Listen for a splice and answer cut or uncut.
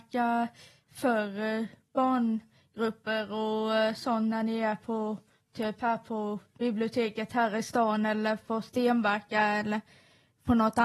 uncut